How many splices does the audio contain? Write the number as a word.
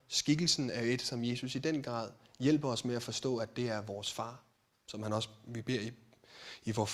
zero